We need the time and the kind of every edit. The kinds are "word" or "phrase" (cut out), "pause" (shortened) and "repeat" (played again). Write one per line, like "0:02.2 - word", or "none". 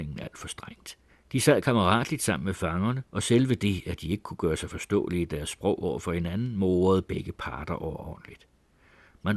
0:01.1 - pause
0:03.1 - pause